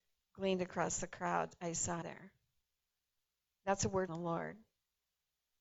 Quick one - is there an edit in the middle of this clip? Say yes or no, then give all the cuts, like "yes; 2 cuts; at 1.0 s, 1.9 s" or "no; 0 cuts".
yes; 2 cuts; at 2.0 s, 4.1 s